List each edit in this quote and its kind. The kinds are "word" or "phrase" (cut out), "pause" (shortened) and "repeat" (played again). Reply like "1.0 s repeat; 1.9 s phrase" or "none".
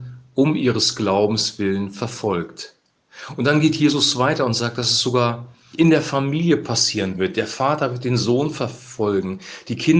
5.7 s word